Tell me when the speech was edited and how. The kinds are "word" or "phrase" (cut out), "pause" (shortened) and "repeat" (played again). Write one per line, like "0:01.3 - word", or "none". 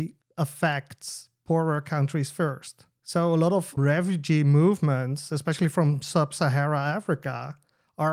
0:03.8 - word